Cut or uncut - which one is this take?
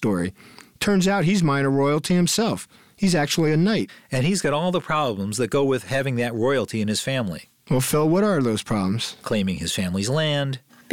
uncut